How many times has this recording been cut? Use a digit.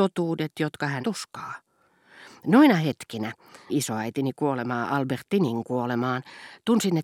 2